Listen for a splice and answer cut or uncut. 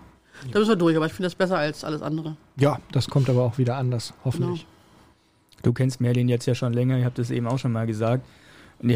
uncut